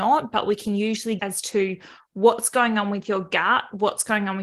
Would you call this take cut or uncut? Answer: cut